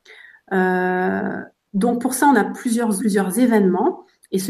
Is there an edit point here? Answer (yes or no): yes